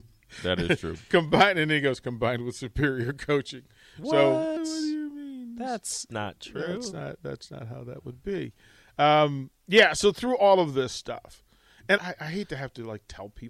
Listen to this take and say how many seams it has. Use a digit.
2